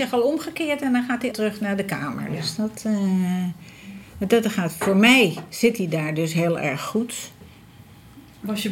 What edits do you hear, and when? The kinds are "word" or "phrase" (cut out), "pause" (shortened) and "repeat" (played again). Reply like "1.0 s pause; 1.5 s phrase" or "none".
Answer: 1.3 s word